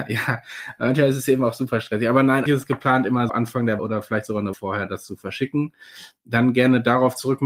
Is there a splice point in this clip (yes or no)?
yes